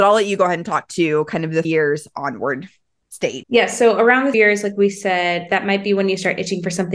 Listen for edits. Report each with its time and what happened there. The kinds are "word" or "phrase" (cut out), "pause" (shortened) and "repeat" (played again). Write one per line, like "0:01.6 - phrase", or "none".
0:01.6 - word
0:03.4 - word
0:04.3 - word